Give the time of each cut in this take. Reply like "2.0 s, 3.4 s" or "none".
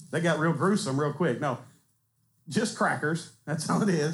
none